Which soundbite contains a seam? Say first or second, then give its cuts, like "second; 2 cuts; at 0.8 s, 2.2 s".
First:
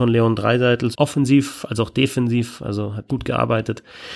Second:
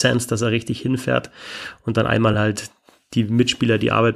first; 2 cuts; at 0.9 s, 3.1 s